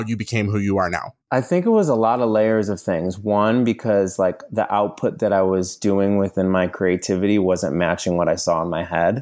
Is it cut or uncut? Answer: cut